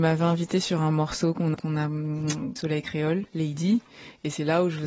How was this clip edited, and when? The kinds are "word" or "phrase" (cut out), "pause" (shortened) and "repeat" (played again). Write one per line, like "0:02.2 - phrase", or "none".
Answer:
0:01.5 - word
0:02.6 - phrase